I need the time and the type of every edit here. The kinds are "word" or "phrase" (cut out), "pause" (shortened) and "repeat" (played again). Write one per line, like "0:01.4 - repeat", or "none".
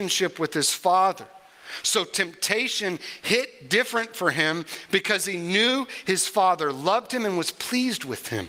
none